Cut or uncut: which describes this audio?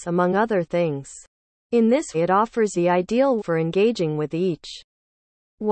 cut